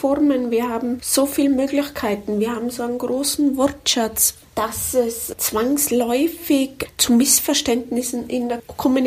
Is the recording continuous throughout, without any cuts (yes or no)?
yes